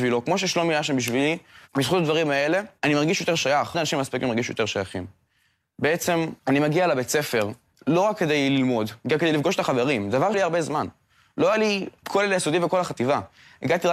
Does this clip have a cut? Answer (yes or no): yes